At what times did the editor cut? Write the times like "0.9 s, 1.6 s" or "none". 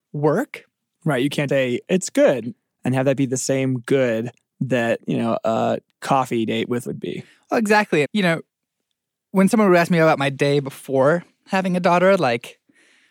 1.5 s, 6.9 s, 8.0 s